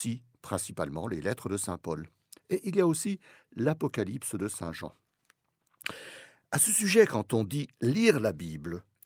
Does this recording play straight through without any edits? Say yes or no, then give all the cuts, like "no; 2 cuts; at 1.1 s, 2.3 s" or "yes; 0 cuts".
yes; 0 cuts